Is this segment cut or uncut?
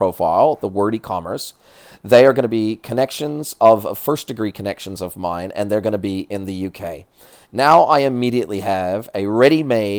uncut